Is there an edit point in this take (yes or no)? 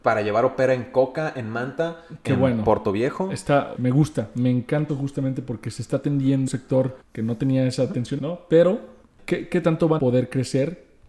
yes